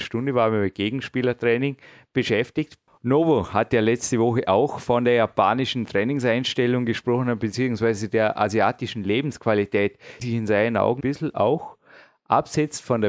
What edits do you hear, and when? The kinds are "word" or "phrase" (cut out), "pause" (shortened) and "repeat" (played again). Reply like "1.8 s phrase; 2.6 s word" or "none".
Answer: 10.2 s word; 11.0 s word